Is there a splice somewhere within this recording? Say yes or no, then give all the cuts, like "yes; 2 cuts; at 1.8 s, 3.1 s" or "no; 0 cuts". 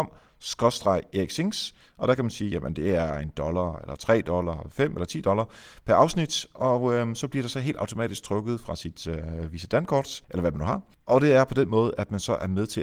yes; 1 cut; at 10.2 s